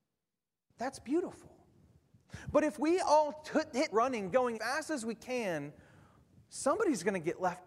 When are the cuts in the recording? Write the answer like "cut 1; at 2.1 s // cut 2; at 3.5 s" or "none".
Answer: cut 1; at 3.9 s // cut 2; at 4.5 s